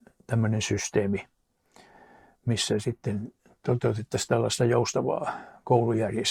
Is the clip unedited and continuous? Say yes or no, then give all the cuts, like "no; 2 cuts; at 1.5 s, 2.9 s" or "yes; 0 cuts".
yes; 0 cuts